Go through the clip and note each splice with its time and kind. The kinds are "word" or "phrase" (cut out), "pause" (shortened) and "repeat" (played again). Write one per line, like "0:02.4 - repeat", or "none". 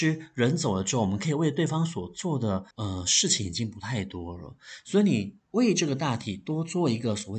0:02.7 - pause